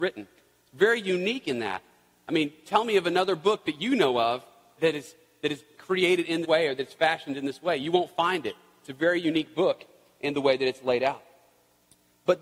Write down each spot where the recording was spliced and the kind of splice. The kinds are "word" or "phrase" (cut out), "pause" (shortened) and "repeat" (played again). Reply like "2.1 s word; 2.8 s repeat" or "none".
4.8 s word; 6.4 s word